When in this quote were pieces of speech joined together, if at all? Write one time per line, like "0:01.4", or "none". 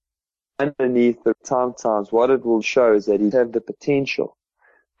0:01.3
0:01.7
0:02.6
0:03.3